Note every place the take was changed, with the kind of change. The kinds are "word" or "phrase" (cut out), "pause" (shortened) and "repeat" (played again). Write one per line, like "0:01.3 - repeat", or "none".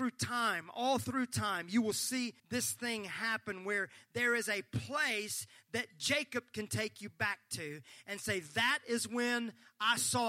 0:02.4 - pause